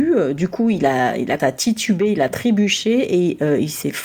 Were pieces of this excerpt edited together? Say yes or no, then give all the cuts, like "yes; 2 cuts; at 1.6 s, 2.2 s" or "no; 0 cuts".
yes; 1 cut; at 1.4 s